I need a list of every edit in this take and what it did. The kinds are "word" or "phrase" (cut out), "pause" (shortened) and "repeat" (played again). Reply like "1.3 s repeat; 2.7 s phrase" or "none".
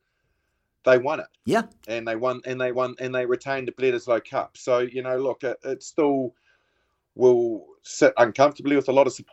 1.3 s pause; 2.7 s repeat